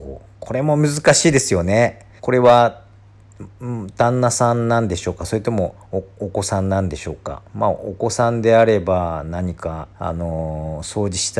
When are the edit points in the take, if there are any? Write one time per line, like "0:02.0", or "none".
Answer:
0:02.2
0:07.5
0:09.9